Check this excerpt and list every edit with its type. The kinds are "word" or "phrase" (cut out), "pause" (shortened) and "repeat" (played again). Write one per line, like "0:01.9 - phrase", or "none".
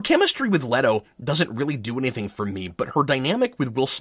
none